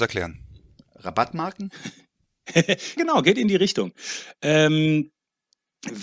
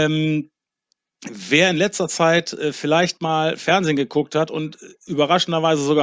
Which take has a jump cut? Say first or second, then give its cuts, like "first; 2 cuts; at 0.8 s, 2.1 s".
first; 1 cut; at 3.0 s